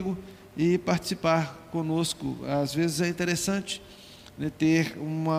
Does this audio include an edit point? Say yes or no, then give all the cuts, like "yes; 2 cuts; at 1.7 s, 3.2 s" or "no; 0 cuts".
no; 0 cuts